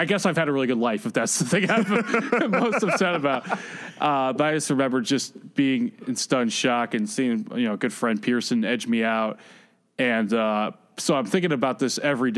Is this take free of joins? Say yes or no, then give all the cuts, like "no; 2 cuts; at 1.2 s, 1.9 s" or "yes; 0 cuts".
yes; 0 cuts